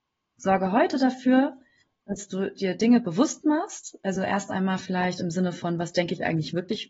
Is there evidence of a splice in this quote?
no; 0 cuts

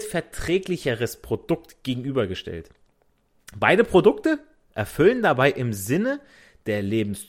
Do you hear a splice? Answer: no; 0 cuts

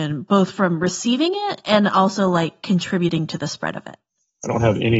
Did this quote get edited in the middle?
no; 0 cuts

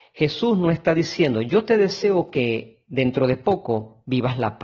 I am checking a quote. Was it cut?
no; 0 cuts

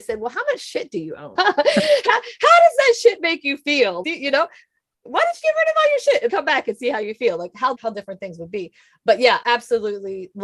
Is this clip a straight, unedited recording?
no; 6 cuts; at 1.4 s, 4.0 s, 5.4 s, 6.3 s, 7.7 s, 9.4 s

